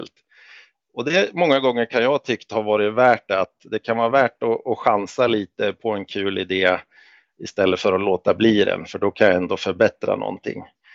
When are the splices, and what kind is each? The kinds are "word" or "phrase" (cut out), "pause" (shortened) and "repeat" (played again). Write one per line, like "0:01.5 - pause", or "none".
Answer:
none